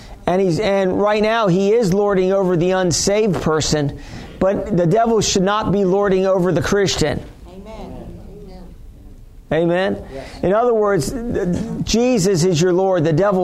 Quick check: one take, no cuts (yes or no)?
yes